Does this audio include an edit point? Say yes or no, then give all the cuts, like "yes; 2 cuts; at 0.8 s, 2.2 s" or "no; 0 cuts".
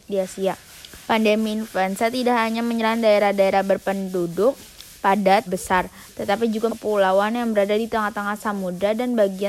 yes; 3 cuts; at 1.0 s, 5.5 s, 6.7 s